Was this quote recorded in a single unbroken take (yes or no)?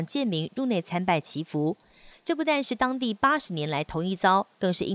yes